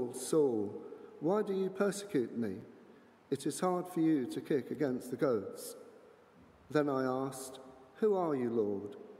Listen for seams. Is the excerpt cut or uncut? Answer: uncut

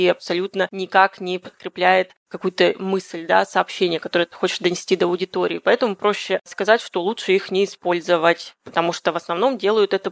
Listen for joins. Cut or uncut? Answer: uncut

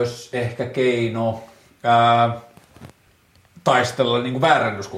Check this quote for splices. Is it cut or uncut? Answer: uncut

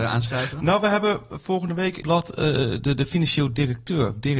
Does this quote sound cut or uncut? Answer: cut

